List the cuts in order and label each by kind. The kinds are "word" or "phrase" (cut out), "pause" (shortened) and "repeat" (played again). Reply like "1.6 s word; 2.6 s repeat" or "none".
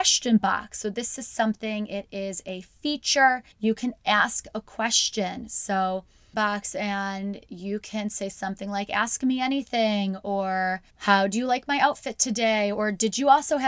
3.5 s pause; 6.3 s phrase; 10.9 s pause